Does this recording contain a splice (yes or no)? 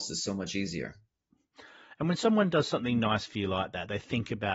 no